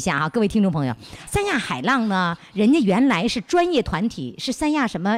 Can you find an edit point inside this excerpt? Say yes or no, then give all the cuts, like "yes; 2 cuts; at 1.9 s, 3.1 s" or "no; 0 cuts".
yes; 1 cut; at 1.3 s